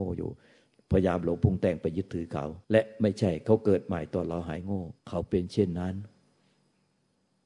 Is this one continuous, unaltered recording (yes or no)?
no